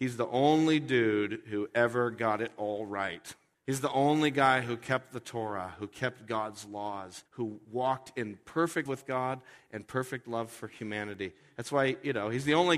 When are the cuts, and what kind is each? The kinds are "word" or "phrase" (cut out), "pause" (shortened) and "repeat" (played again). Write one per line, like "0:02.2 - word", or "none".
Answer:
0:03.5 - pause
0:07.3 - pause
0:08.9 - word